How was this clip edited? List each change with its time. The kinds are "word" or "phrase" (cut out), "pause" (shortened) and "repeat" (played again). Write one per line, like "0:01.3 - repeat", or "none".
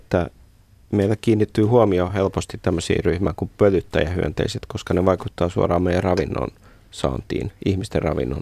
none